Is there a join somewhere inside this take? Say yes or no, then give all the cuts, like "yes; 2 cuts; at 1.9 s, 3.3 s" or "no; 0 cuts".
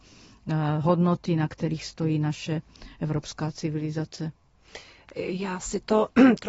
no; 0 cuts